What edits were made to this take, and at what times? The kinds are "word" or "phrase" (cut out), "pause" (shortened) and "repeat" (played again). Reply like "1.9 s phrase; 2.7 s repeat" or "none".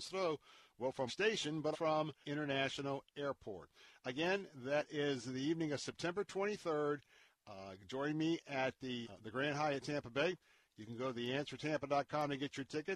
1.1 s word; 1.7 s word; 2.2 s word; 9.0 s word